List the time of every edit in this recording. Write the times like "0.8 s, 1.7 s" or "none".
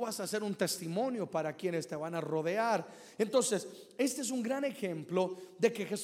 none